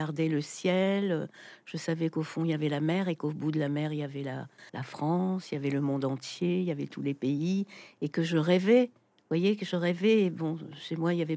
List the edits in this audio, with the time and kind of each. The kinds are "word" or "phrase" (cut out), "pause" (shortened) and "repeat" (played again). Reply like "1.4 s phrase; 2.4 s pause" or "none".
4.7 s pause

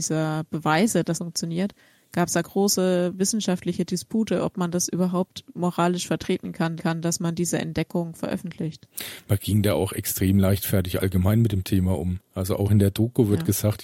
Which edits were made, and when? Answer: 1.1 s word; 2.4 s word; 6.8 s repeat

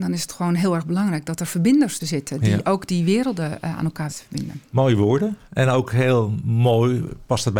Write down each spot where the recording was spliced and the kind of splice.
2.0 s word; 4.1 s word; 5.5 s pause

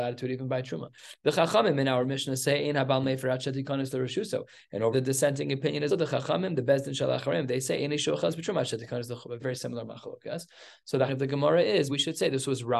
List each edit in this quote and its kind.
4.9 s word; 5.9 s word; 9.4 s word; 11.1 s word; 11.9 s word

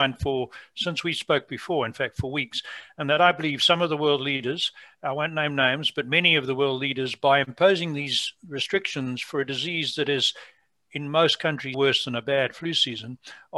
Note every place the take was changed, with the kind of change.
11.7 s word

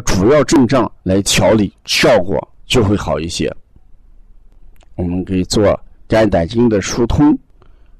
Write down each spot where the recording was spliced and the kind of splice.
1.0 s pause; 1.8 s pause

